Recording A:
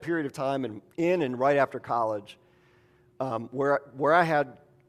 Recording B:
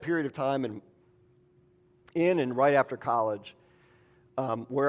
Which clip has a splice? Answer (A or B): A